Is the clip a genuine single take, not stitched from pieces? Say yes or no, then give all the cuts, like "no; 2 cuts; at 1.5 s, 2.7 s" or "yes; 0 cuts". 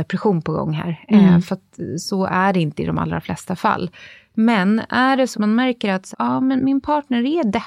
no; 3 cuts; at 5.3 s, 6.1 s, 6.6 s